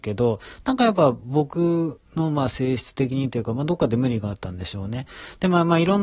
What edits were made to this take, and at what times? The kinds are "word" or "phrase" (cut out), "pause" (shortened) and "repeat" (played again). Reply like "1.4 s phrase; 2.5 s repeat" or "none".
2.1 s pause